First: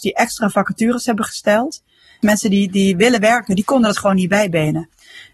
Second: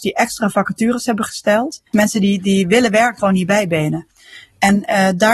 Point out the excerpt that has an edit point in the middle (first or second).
second